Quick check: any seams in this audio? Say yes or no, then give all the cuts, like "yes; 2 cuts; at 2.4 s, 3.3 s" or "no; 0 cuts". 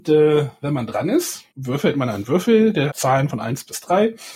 yes; 2 cuts; at 1.5 s, 2.9 s